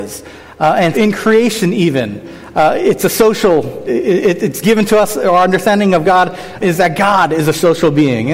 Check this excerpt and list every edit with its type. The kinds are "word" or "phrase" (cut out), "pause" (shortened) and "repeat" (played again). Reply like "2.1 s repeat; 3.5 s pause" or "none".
0.9 s word; 3.9 s word; 6.6 s word